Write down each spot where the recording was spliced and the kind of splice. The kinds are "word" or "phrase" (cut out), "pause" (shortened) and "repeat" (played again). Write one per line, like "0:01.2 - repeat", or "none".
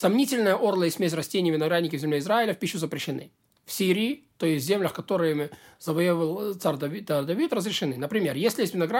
none

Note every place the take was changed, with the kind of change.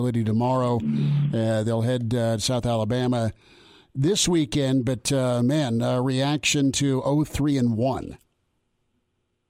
none

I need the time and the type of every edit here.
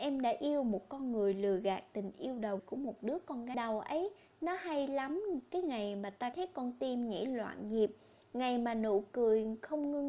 0:02.6 - word
0:03.5 - phrase
0:06.3 - word

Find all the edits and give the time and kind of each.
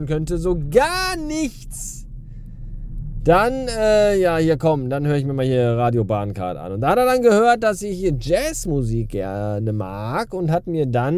none

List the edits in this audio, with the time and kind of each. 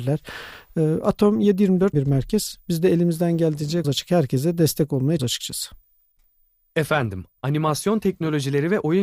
0:01.9 - word
0:03.8 - word
0:05.2 - word
0:07.4 - word

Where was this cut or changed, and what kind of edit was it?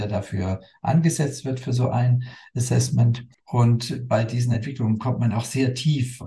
none

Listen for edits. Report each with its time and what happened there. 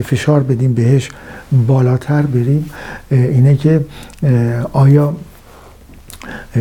none

